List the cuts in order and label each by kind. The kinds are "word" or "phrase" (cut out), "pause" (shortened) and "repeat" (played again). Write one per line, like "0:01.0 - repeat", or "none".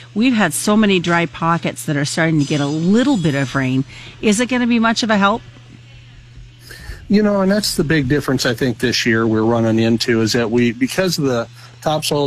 none